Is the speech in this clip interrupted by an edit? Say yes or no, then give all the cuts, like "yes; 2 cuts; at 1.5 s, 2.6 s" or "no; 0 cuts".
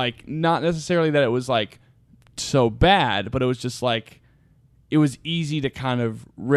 no; 0 cuts